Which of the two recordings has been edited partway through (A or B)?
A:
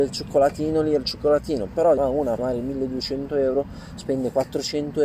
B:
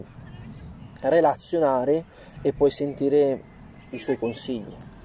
A